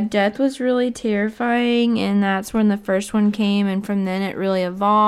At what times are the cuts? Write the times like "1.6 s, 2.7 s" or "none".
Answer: none